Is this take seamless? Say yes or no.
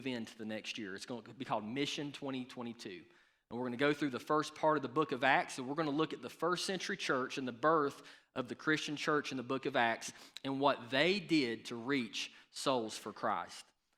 yes